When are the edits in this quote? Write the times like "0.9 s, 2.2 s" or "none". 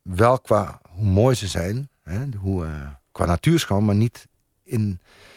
none